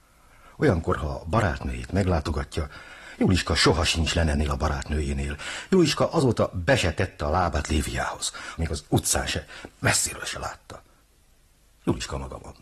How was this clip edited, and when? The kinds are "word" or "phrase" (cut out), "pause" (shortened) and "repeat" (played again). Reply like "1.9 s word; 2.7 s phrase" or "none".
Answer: 8.6 s phrase

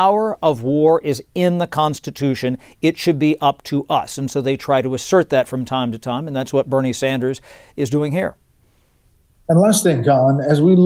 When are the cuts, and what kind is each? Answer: none

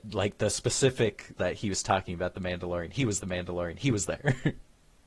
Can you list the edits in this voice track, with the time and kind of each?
1.4 s word; 3.2 s repeat

